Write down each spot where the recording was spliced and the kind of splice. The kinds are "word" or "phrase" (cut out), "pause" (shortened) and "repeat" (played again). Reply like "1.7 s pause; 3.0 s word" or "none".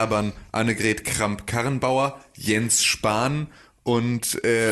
none

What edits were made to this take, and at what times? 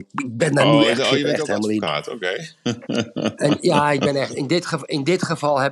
1.0 s word

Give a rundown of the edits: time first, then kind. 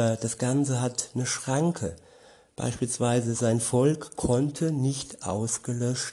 none

